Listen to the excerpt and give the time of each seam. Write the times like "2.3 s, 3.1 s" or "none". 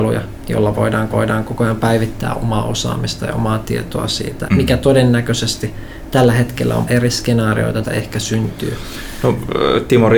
1.1 s, 4.5 s, 6.9 s, 7.8 s